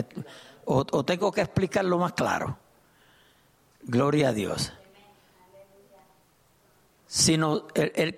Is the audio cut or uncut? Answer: uncut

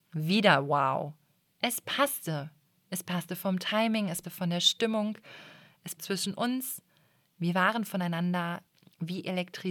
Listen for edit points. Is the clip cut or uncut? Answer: cut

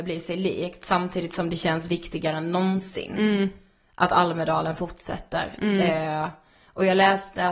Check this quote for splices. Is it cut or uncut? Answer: uncut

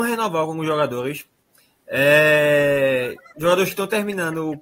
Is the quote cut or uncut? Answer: uncut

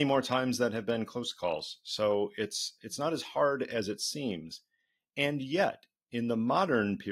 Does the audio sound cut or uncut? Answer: uncut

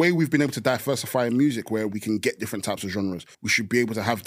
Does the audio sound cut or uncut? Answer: cut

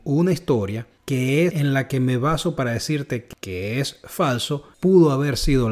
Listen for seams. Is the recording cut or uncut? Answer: cut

